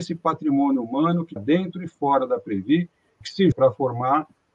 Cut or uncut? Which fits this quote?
cut